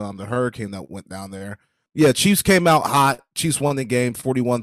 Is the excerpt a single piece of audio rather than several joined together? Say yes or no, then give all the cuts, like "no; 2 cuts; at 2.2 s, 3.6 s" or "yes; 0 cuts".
yes; 0 cuts